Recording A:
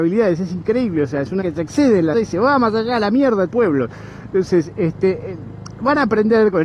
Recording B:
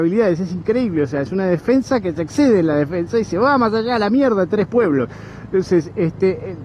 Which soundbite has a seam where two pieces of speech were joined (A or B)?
A